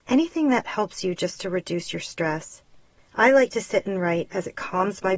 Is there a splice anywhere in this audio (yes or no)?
no